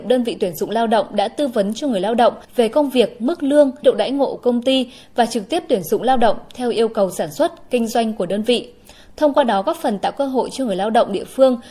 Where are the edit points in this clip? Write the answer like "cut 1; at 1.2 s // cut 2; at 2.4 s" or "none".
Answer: cut 1; at 2.4 s // cut 2; at 3.8 s // cut 3; at 4.4 s